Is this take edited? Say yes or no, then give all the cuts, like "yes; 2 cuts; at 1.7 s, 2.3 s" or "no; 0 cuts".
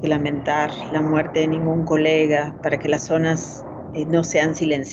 no; 0 cuts